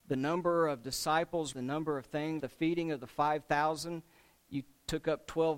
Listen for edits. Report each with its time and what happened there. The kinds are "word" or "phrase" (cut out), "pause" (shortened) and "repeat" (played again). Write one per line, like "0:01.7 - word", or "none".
0:01.5 - word
0:02.4 - word